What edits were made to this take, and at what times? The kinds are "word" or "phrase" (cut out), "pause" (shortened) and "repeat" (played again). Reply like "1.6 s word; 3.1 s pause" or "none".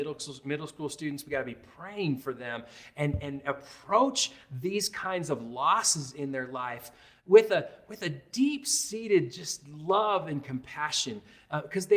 none